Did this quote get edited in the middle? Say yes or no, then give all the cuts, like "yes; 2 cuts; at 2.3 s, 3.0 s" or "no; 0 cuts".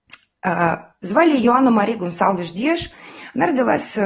no; 0 cuts